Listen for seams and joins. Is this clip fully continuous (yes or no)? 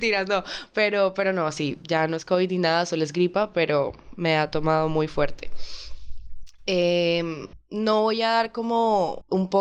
yes